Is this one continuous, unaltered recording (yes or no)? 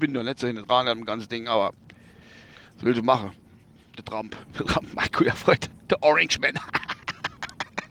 yes